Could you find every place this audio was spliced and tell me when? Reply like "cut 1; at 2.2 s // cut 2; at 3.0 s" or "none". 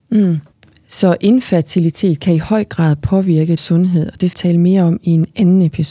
cut 1; at 3.6 s // cut 2; at 4.3 s